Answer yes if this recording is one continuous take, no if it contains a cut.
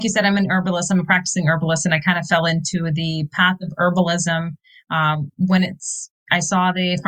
yes